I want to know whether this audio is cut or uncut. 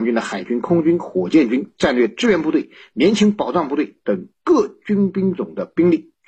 uncut